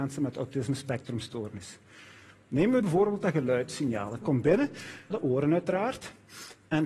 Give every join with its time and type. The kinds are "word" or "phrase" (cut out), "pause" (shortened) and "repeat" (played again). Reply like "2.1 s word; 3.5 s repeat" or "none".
2.8 s word; 4.2 s word; 5.1 s word